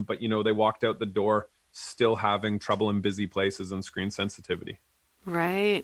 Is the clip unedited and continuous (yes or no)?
yes